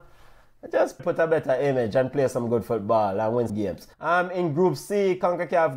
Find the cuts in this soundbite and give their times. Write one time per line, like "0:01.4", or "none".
0:01.0
0:03.5
0:03.9

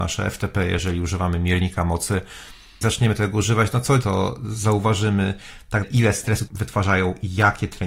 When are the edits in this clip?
0:02.8
0:04.0
0:05.8
0:06.5

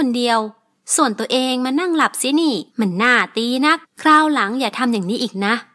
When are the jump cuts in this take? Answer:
0:02.7
0:03.8

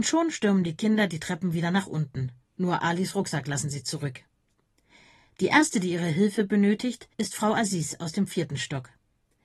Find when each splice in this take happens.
0:02.5
0:07.1

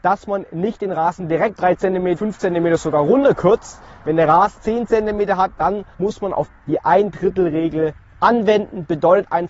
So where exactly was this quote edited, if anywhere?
0:01.6
0:02.2
0:04.6
0:05.9
0:06.5

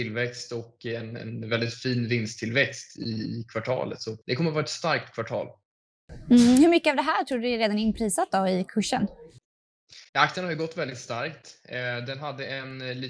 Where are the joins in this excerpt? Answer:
0:04.2
0:10.1

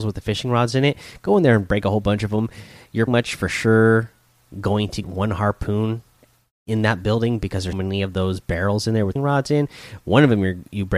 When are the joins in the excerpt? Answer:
0:03.1
0:05.0
0:07.7
0:09.2

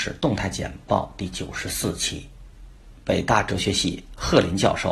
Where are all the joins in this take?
0:03.0

